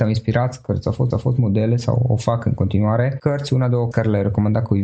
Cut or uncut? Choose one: cut